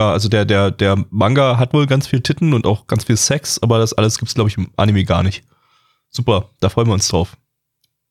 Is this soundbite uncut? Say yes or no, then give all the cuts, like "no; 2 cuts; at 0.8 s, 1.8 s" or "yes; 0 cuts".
yes; 0 cuts